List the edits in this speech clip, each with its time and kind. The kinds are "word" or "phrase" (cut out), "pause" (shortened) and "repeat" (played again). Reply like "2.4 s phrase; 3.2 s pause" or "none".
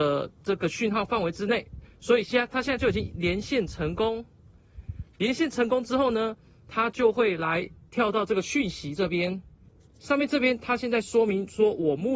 none